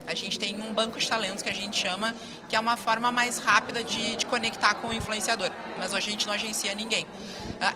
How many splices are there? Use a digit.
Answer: 0